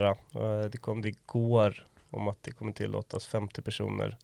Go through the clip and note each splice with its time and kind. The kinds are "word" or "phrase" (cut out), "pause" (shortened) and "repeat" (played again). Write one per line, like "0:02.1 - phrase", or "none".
0:01.0 - word

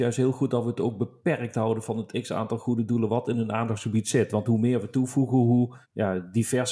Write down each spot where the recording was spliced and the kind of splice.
0:05.8 - pause

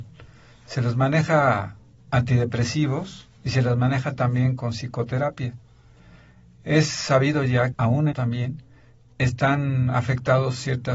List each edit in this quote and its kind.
0:03.4 - pause
0:04.6 - word
0:07.7 - phrase
0:08.1 - word

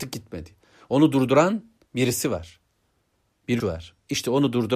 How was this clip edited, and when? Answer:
0:01.8 - pause
0:03.6 - word

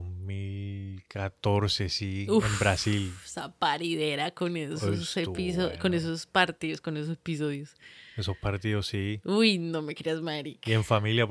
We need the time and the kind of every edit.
none

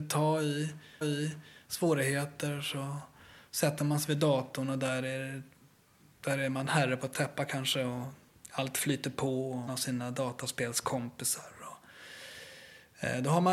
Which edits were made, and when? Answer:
0:01.0 - repeat
0:09.7 - word

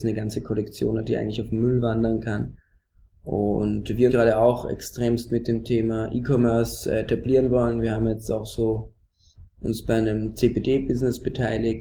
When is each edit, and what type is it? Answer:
0:04.1 - word

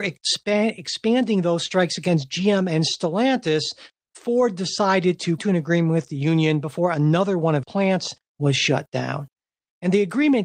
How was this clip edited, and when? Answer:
0:05.4 - word
0:07.6 - word

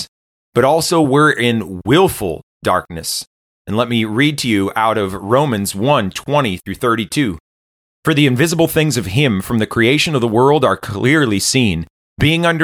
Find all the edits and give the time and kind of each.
none

